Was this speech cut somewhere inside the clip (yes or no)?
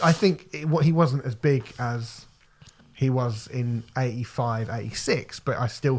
no